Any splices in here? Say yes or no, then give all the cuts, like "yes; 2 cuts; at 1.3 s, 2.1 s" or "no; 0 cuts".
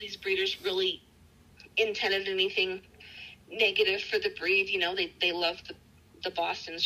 no; 0 cuts